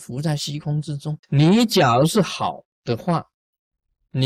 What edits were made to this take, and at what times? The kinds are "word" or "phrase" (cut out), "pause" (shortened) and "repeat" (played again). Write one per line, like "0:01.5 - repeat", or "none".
0:01.2 - pause
0:02.7 - pause